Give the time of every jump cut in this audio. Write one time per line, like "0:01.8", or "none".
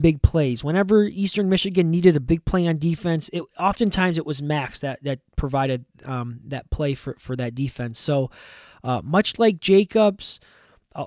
none